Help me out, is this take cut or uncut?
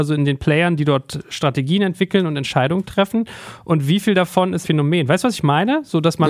cut